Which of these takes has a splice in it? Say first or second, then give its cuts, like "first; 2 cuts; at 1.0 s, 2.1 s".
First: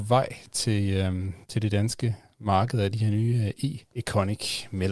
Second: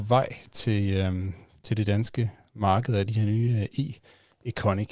first; 2 cuts; at 1.4 s, 3.8 s